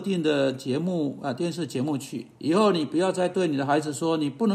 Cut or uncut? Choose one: cut